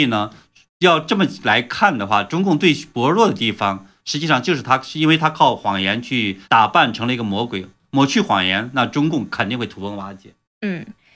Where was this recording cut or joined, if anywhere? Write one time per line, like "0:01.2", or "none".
0:06.4